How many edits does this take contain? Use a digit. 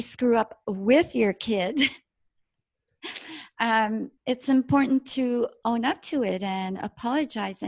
1